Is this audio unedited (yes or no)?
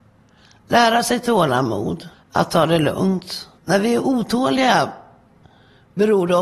no